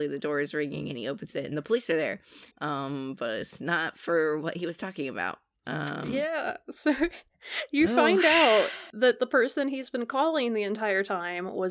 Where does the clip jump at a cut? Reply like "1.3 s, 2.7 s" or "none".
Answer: 2.5 s